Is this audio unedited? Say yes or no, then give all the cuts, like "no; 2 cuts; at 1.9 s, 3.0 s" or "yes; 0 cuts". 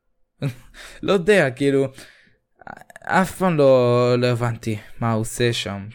yes; 0 cuts